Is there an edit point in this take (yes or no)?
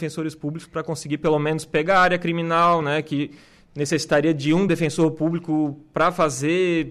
no